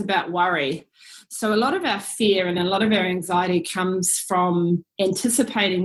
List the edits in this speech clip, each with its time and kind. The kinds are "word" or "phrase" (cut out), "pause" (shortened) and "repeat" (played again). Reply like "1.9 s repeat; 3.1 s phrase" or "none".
none